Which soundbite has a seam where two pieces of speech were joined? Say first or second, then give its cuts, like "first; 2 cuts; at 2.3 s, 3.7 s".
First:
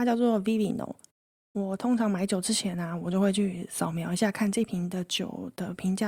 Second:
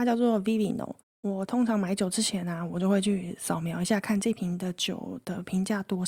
second; 1 cut; at 1.0 s